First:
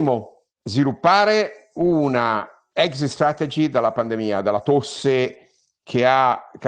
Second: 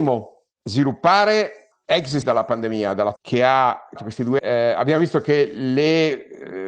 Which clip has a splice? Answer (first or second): second